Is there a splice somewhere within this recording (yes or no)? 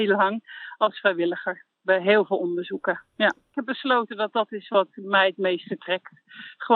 yes